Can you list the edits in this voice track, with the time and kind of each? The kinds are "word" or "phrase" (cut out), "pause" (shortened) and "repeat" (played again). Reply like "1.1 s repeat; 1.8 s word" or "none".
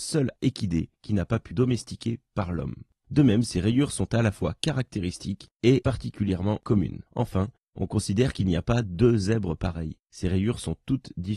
1.5 s word; 7.1 s pause; 10.1 s pause

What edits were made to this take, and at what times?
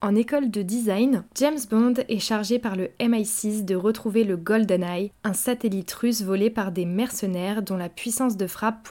1.3 s pause

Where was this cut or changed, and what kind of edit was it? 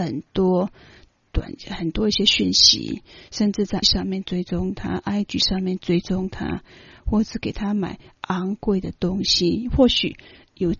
3.8 s word

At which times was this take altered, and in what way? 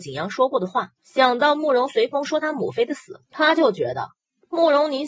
1.0 s pause; 3.2 s pause

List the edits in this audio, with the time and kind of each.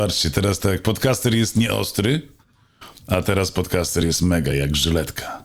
none

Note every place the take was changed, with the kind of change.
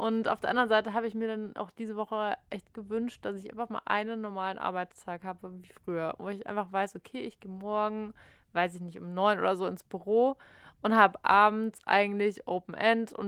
none

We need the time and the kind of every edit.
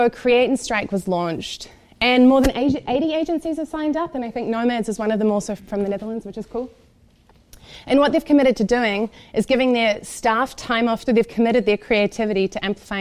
5.6 s word; 11.1 s phrase

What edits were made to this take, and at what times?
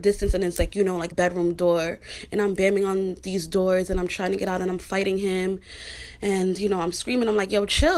1.1 s word

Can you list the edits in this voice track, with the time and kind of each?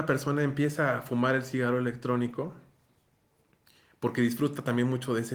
none

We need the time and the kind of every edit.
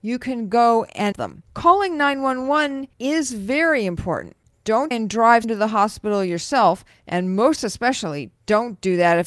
1.1 s word; 1.5 s pause; 2.9 s pause; 4.9 s word; 5.4 s word

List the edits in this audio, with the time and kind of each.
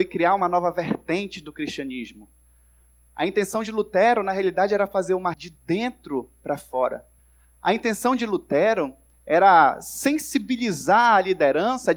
5.3 s word; 7.2 s pause

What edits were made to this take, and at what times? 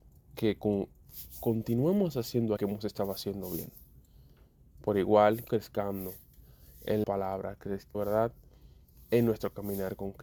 2.6 s word; 5.5 s word; 7.0 s word; 7.9 s word

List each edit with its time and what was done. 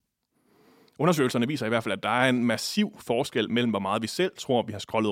none

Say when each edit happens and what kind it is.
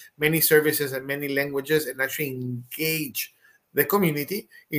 none

